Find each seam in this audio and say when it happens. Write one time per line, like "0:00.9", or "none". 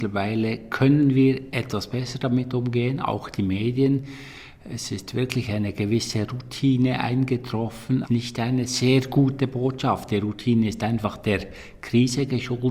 0:08.0